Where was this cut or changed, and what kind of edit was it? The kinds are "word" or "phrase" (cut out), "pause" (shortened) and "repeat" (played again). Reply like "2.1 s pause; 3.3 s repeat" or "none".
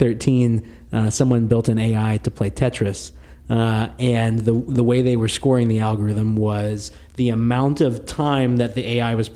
none